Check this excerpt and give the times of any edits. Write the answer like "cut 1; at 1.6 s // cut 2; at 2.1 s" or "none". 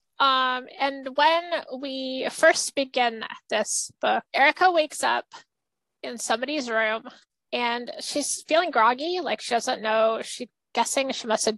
cut 1; at 4.3 s // cut 2; at 5.5 s // cut 3; at 7.2 s